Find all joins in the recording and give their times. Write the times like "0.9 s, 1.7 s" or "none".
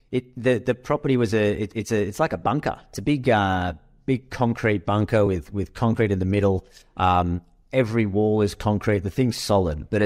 none